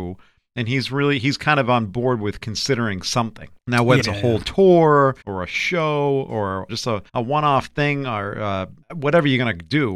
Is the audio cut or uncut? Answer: cut